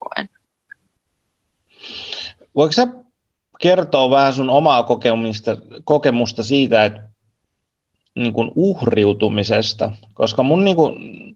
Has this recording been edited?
no; 0 cuts

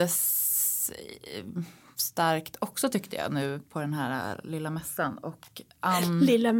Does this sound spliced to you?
no; 0 cuts

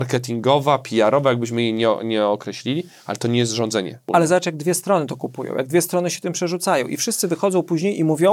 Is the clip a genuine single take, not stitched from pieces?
yes; 0 cuts

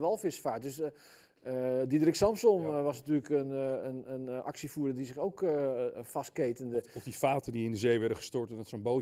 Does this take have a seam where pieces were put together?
no; 0 cuts

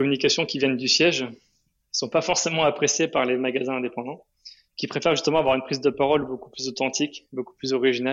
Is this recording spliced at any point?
no; 0 cuts

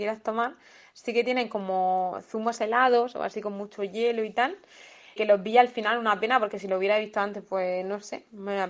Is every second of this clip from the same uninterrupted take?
no; 1 cut; at 5.2 s

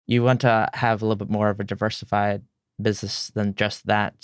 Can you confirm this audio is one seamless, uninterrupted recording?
yes; 0 cuts

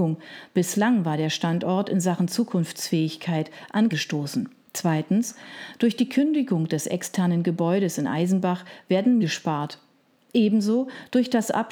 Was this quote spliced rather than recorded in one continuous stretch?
yes; 3 cuts; at 3.9 s, 4.6 s, 9.2 s

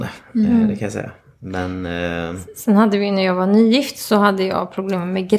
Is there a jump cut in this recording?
no; 0 cuts

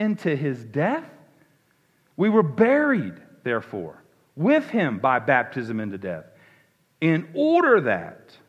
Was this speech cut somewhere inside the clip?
no; 0 cuts

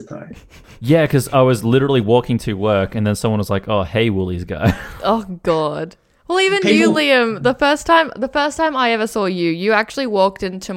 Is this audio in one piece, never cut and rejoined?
yes; 0 cuts

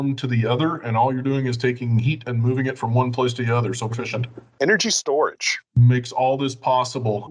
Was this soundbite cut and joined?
yes; 1 cut; at 3.9 s

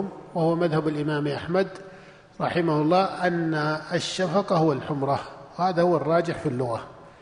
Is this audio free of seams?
yes; 0 cuts

